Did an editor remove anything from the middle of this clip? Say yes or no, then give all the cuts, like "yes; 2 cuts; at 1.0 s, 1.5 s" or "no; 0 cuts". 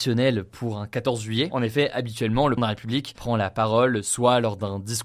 yes; 1 cut; at 2.6 s